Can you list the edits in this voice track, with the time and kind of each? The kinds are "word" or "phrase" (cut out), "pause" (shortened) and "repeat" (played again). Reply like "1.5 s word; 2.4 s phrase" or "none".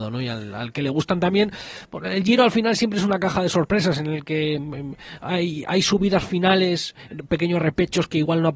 none